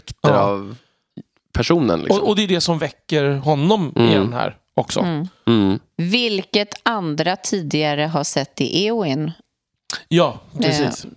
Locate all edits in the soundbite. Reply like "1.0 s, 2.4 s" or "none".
none